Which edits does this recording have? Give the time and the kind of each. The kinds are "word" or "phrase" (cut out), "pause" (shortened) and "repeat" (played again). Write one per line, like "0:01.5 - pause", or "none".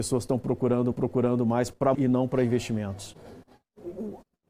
0:00.9 - repeat
0:01.9 - word